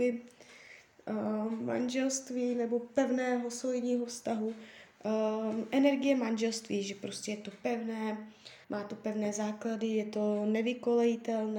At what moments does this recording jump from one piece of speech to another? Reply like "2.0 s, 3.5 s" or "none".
8.6 s